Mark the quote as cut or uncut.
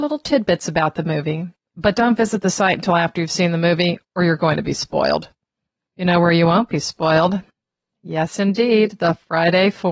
uncut